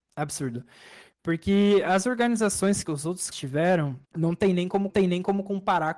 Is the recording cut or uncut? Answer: cut